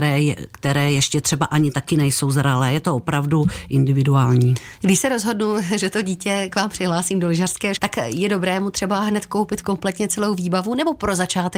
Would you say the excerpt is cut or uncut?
cut